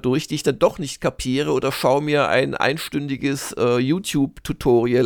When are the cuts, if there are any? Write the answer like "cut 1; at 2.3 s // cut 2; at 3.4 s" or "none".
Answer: none